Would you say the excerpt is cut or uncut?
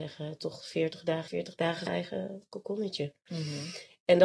cut